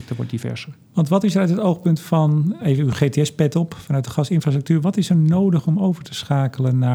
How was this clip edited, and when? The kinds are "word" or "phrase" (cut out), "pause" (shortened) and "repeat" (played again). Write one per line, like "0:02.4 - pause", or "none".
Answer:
0:02.6 - word